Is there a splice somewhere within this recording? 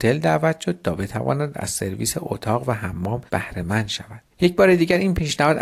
yes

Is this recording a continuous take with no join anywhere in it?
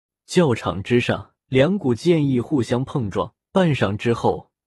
no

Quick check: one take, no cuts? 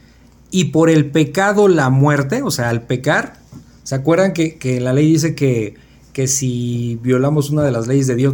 yes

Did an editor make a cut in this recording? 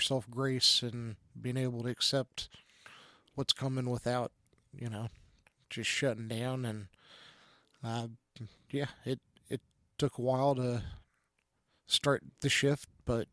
no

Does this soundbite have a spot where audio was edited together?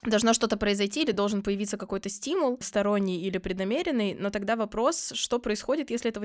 no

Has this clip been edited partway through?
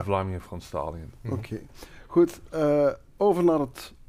no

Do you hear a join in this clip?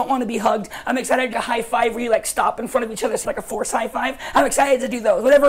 yes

